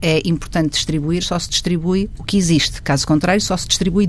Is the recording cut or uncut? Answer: cut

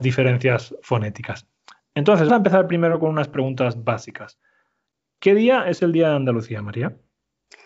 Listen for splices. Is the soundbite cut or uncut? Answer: cut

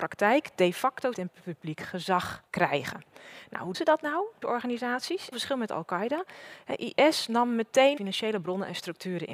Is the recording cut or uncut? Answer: cut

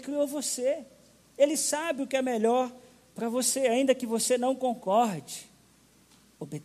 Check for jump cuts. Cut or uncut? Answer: uncut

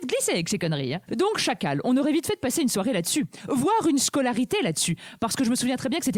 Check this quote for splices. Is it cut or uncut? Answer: uncut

